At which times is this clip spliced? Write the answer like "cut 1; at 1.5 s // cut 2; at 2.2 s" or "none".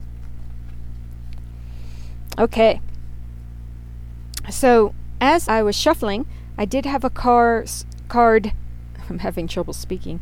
cut 1; at 5.4 s